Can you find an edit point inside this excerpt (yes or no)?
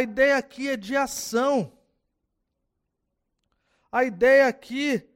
no